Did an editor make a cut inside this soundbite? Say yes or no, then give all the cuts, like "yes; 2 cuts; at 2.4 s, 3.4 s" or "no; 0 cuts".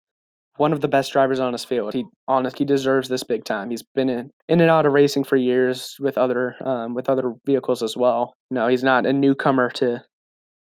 yes; 4 cuts; at 1.9 s, 2.5 s, 4.4 s, 8.4 s